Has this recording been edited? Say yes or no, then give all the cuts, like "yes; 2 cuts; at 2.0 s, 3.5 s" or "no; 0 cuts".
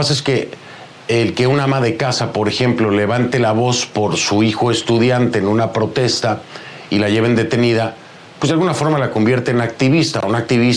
no; 0 cuts